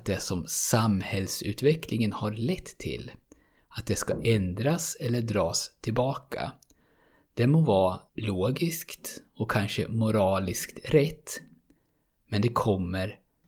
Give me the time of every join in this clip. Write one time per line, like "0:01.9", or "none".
0:08.1